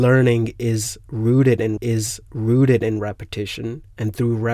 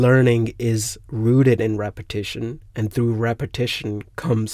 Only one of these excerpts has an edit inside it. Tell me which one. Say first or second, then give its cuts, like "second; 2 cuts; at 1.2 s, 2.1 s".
first; 1 cut; at 1.8 s